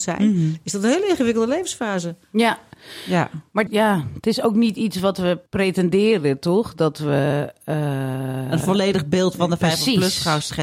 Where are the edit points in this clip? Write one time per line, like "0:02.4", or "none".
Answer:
0:03.7
0:05.5